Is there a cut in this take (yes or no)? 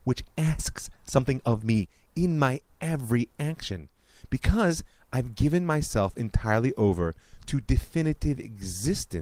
no